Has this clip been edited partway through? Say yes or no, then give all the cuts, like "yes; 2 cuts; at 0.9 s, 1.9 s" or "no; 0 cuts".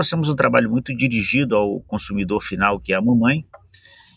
no; 0 cuts